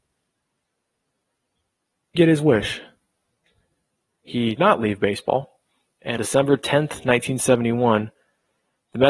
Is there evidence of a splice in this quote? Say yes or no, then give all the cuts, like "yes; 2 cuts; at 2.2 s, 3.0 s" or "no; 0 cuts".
yes; 3 cuts; at 2.2 s, 4.6 s, 6.2 s